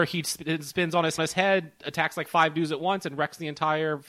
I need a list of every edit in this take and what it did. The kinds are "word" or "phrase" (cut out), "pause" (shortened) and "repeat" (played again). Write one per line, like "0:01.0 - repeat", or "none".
0:01.2 - repeat